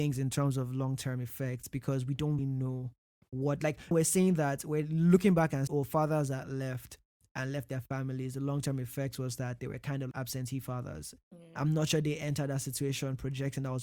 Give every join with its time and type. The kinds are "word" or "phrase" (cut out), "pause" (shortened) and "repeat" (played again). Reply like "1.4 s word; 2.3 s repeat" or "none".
2.4 s word; 3.9 s word; 5.7 s word; 10.1 s word